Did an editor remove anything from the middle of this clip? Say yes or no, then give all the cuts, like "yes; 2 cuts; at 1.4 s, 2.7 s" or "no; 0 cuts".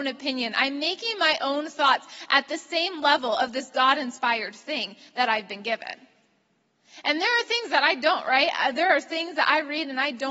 no; 0 cuts